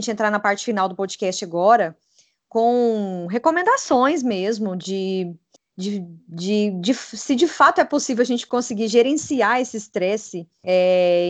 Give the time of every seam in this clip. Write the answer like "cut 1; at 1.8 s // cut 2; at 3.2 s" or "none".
none